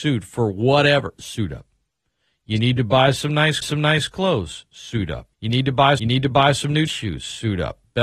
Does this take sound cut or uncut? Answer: cut